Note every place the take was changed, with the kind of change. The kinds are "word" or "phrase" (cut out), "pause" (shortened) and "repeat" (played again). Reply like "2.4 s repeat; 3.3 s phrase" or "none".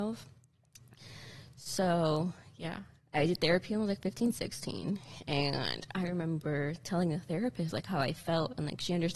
none